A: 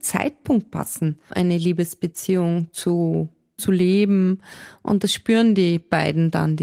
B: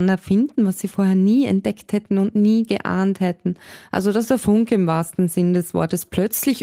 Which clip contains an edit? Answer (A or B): A